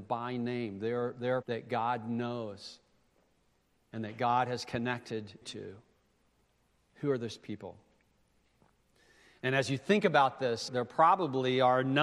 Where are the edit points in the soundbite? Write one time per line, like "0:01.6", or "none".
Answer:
0:01.4
0:05.4
0:10.7